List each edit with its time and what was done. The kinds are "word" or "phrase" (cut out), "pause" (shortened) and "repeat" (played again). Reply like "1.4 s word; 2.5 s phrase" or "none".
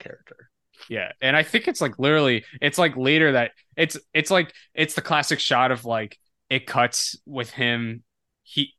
none